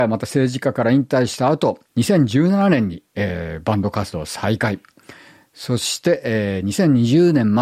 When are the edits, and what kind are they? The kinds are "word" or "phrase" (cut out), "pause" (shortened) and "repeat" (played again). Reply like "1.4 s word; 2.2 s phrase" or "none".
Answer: 1.9 s pause